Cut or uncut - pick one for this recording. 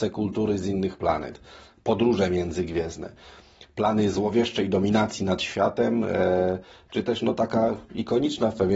uncut